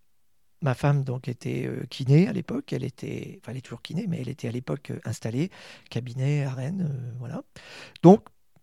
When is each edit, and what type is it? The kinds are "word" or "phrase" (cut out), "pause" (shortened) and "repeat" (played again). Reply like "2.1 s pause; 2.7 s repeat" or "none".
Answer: none